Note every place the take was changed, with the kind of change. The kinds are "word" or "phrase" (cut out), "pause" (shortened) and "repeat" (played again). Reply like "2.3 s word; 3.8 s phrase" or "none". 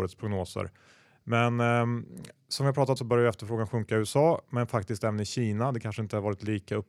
3.0 s word